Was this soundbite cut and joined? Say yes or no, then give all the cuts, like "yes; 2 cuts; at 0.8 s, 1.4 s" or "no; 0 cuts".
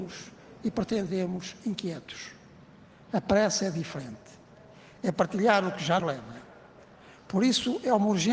yes; 1 cut; at 6.0 s